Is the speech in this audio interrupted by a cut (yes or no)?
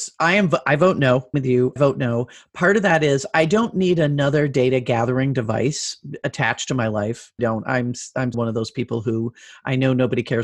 yes